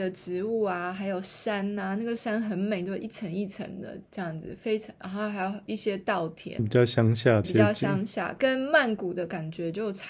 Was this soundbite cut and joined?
yes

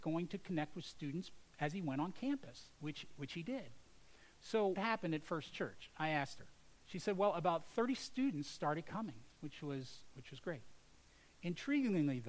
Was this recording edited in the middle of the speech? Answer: yes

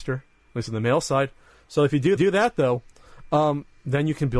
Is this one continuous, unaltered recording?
no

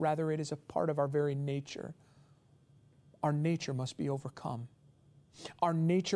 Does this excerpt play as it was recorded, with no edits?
yes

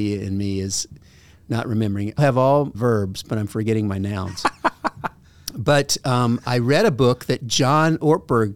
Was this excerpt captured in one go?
no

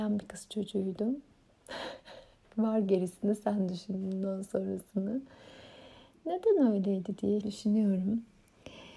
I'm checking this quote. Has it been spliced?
yes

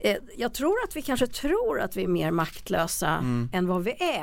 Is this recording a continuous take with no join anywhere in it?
yes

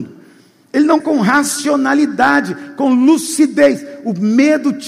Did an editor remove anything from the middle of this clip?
yes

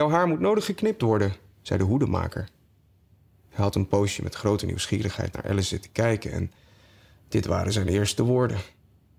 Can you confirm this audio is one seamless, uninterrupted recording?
yes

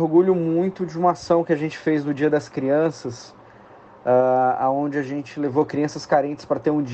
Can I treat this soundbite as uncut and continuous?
yes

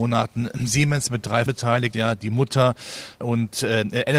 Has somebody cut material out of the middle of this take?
yes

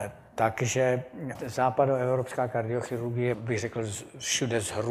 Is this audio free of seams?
no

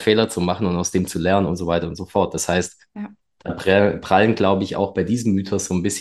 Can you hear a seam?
no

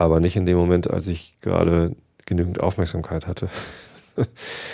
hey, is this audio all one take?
yes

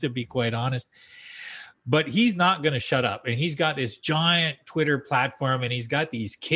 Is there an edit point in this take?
no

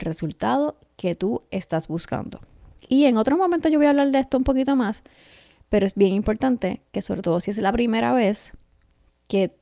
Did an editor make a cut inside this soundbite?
no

